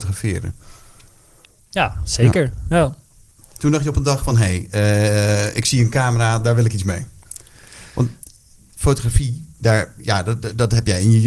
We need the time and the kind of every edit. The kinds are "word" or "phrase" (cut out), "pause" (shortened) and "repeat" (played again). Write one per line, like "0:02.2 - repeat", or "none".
none